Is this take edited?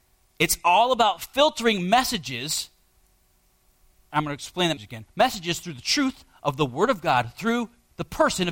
yes; 1 cut; at 4.8 s

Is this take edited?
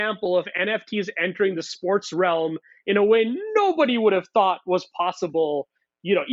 no; 0 cuts

